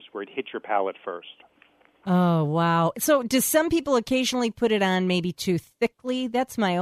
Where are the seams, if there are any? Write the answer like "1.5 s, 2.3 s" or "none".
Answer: none